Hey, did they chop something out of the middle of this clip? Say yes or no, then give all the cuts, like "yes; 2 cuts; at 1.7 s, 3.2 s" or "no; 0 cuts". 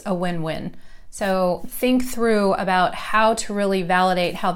no; 0 cuts